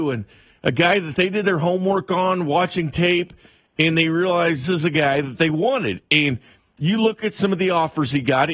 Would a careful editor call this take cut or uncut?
cut